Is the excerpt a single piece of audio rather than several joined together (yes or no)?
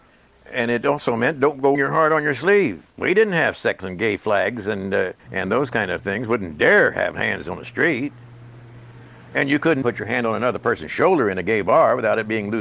no